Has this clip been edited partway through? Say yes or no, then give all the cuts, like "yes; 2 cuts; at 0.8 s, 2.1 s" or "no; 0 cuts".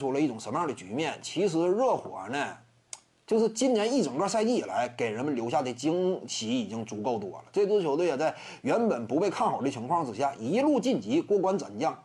no; 0 cuts